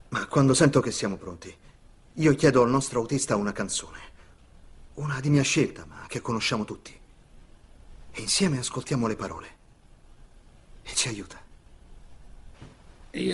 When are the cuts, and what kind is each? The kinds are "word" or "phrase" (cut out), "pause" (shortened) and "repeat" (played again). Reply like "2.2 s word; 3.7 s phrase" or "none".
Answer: none